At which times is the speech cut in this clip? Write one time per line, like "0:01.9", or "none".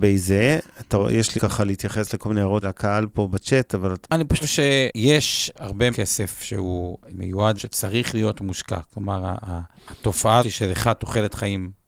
0:01.4
0:02.6
0:04.0
0:04.4
0:05.9
0:07.1
0:07.6
0:10.4